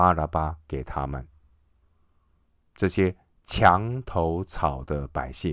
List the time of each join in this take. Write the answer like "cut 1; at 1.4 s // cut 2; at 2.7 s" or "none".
none